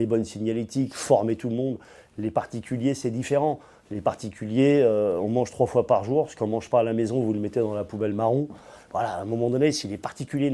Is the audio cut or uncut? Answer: uncut